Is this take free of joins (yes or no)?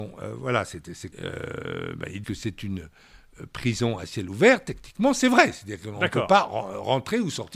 no